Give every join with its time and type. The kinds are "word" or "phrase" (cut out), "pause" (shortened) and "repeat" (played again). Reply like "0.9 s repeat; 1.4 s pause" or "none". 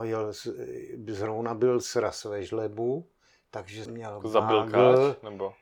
3.9 s word